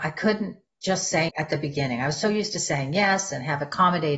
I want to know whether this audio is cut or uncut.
cut